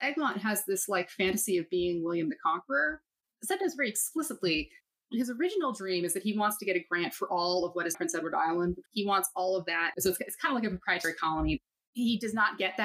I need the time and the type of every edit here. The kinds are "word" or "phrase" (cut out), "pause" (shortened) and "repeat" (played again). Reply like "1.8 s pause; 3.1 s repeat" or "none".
7.9 s word